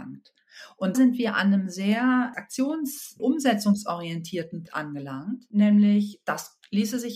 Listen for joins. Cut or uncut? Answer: cut